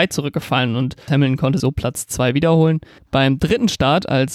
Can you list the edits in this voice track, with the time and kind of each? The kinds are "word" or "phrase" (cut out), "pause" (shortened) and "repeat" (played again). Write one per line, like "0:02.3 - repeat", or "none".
0:01.1 - word
0:01.6 - word